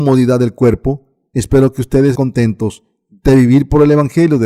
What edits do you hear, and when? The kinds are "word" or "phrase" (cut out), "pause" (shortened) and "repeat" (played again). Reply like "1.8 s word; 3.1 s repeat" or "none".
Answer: 2.1 s word